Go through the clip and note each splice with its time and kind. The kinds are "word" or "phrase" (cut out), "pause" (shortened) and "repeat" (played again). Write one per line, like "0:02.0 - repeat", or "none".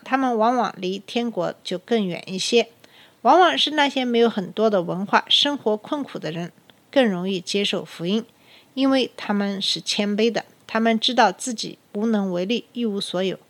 0:11.8 - pause